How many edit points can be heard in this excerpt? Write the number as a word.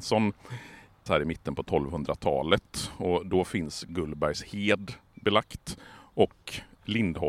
one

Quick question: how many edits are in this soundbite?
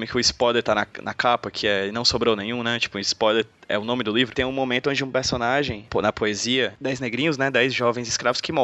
zero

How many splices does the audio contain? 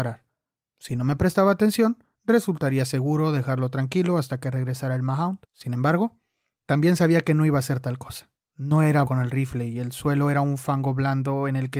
three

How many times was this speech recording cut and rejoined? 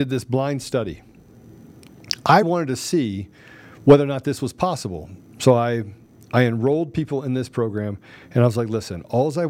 one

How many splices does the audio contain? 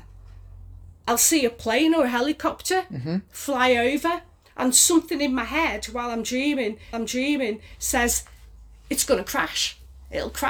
one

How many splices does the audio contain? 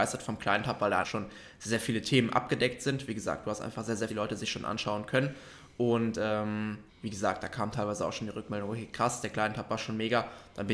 three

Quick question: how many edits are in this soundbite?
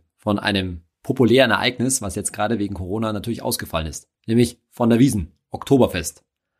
one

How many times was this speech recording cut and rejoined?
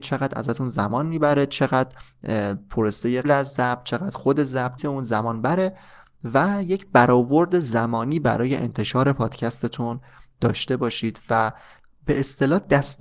two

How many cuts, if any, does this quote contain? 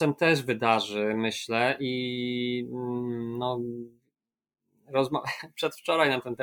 zero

